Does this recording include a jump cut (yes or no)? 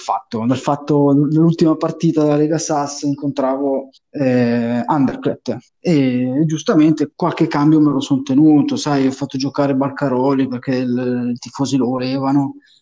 yes